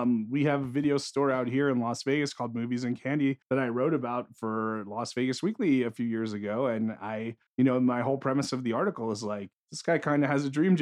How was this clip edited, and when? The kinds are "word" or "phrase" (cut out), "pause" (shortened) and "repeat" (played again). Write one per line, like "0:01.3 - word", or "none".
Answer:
0:03.4 - pause
0:07.5 - pause
0:09.5 - pause